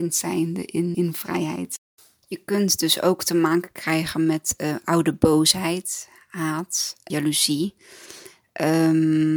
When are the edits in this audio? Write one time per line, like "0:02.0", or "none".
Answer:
0:00.9
0:02.0
0:07.1